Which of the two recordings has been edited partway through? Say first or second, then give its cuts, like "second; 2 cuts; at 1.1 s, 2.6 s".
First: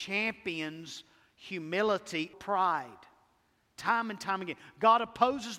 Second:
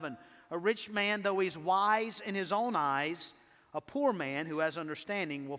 first; 1 cut; at 2.3 s